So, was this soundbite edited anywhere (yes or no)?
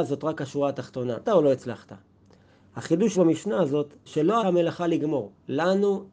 yes